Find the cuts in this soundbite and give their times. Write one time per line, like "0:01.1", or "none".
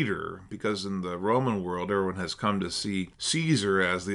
0:03.1